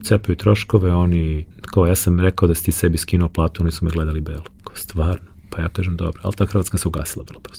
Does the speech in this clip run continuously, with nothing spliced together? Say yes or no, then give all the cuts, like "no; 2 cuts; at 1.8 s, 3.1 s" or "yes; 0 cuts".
no; 2 cuts; at 1.5 s, 4.6 s